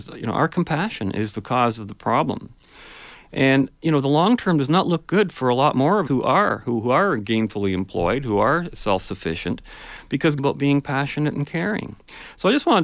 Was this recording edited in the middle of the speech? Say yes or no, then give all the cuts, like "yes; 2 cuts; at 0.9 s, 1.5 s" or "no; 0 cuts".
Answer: yes; 3 cuts; at 3.8 s, 6.1 s, 10.4 s